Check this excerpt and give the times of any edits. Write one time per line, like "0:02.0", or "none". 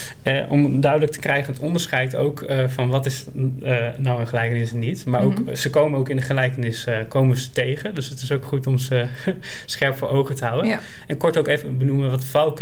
none